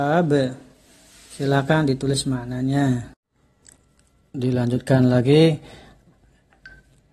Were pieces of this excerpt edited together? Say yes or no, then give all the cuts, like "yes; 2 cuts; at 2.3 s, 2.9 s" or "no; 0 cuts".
no; 0 cuts